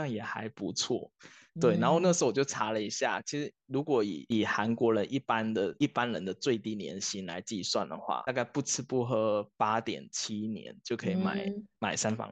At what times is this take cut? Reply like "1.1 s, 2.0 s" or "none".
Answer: none

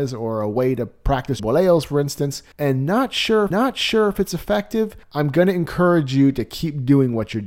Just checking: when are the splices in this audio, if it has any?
1.4 s, 2.5 s, 3.5 s, 5.0 s

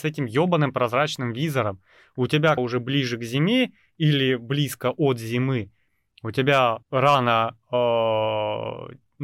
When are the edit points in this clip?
2.6 s, 6.8 s

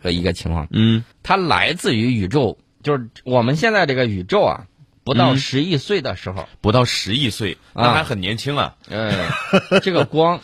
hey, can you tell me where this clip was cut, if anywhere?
1.1 s, 4.9 s

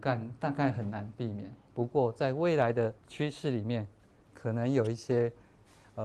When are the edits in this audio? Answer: 3.0 s

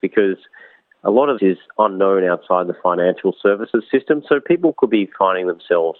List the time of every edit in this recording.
1.4 s

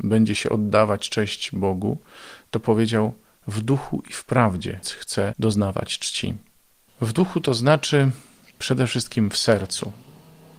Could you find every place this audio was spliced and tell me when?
4.8 s

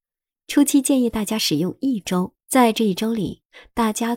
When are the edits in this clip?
2.4 s

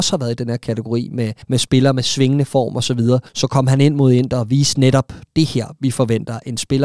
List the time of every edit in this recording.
1.4 s, 3.3 s

